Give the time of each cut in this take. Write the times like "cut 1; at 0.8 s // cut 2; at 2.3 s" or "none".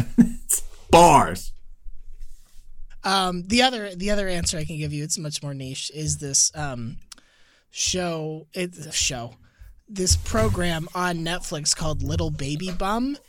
none